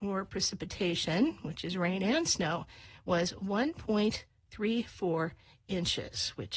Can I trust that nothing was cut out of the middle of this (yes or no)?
yes